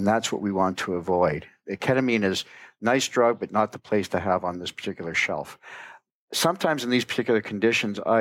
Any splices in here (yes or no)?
no